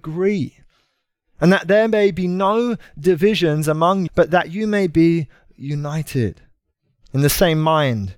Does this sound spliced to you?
yes; 1 cut; at 4.1 s

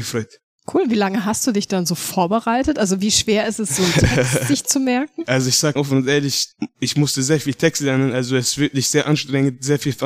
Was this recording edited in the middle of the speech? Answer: yes; 1 cut; at 6.5 s

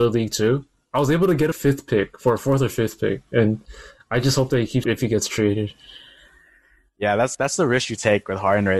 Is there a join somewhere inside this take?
yes; 3 cuts; at 1.5 s, 4.8 s, 7.3 s

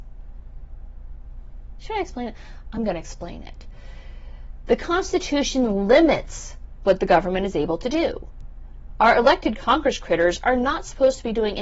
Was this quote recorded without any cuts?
yes; 0 cuts

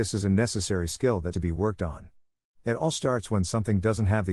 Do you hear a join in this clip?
yes; 1 cut; at 1.3 s

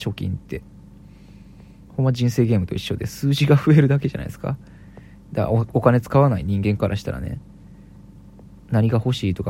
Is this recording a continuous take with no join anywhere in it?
no; 1 cut; at 1.9 s

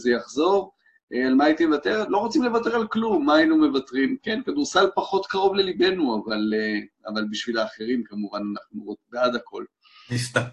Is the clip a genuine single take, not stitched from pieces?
yes; 0 cuts

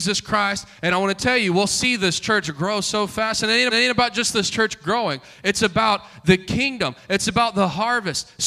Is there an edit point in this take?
yes; 1 cut; at 3.7 s

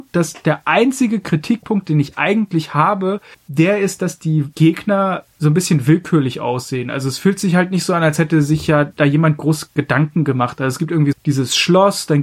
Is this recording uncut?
no; 3 cuts; at 3.3 s, 4.5 s, 11.1 s

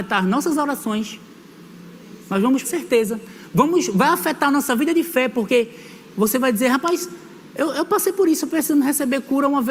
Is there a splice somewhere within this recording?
yes; 1 cut; at 2.6 s

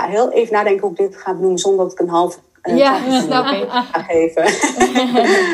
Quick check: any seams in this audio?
no; 0 cuts

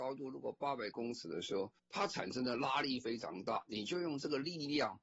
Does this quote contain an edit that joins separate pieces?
yes; 1 cut; at 1.8 s

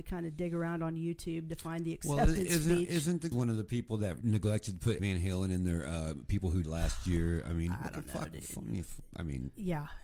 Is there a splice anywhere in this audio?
yes; 4 cuts; at 3.3 s, 4.2 s, 5.0 s, 6.6 s

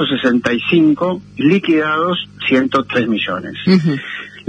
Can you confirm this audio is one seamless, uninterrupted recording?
no; 2 cuts; at 1.4 s, 2.4 s

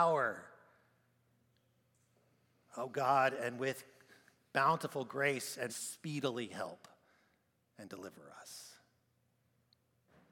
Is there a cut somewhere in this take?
yes; 1 cut; at 5.7 s

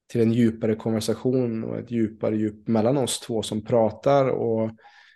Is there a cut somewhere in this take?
no; 0 cuts

